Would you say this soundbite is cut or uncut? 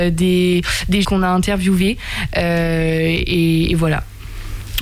cut